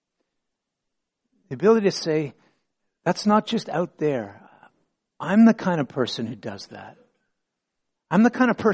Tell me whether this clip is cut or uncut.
uncut